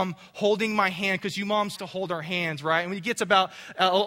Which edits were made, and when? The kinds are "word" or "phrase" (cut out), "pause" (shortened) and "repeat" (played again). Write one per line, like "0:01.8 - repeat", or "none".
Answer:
0:01.8 - word